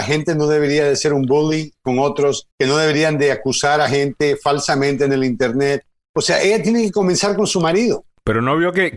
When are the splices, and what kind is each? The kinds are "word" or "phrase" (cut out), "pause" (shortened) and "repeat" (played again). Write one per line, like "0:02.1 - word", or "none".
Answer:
0:02.5 - pause